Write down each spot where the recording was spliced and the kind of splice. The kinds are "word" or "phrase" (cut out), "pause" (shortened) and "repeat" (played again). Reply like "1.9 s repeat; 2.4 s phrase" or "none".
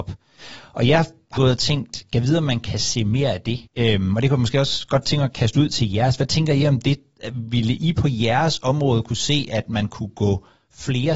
1.4 s word; 3.7 s pause